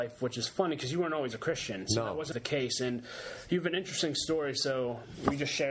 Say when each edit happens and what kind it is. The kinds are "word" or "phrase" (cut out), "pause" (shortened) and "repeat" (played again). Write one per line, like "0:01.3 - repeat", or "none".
0:02.3 - word